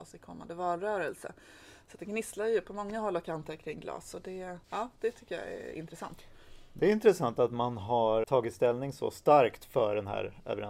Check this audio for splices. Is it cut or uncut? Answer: cut